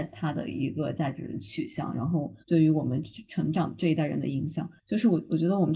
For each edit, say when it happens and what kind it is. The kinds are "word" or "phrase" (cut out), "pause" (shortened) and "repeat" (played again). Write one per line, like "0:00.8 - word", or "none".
0:02.4 - pause
0:04.8 - pause